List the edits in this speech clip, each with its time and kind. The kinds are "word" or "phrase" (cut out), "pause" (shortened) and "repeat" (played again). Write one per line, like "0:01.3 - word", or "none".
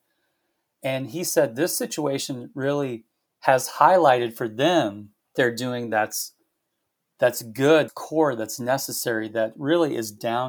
0:03.3 - pause
0:05.4 - word
0:07.9 - word